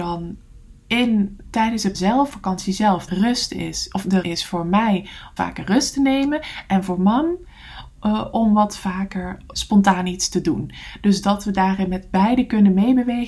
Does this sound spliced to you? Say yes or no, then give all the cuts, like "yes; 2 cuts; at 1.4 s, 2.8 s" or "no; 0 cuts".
yes; 7 cuts; at 1.4 s, 1.9 s, 2.3 s, 3.1 s, 4.2 s, 5.4 s, 9.5 s